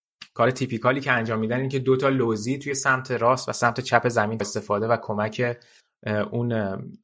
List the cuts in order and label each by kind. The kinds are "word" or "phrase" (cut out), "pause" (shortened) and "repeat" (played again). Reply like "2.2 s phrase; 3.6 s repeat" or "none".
4.4 s phrase